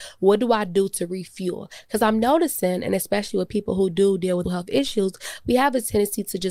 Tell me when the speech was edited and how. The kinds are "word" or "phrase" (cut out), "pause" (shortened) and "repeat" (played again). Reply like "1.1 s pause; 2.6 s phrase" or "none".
4.4 s word